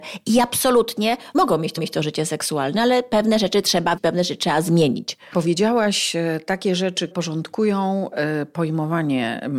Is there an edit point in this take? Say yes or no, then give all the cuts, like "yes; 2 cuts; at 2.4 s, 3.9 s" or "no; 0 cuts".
yes; 4 cuts; at 1.3 s, 1.8 s, 4.0 s, 7.1 s